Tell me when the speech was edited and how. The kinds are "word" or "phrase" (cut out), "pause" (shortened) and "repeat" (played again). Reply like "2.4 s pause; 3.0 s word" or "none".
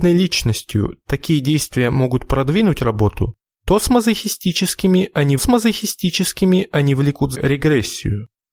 5.4 s repeat; 7.3 s word